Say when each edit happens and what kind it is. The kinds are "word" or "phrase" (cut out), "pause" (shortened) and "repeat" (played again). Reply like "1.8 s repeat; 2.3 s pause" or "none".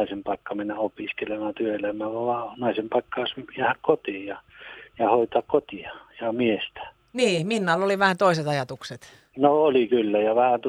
none